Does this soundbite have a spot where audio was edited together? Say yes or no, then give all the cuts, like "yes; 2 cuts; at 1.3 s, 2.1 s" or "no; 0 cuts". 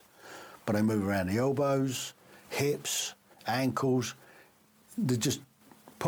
yes; 1 cut; at 3.3 s